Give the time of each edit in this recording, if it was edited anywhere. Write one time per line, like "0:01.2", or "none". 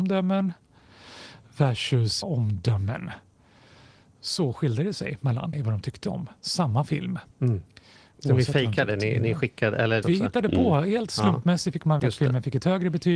0:02.2
0:05.5
0:06.4
0:07.3
0:10.0
0:12.0